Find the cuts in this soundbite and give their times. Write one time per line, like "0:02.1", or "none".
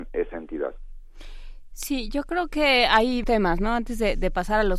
0:03.2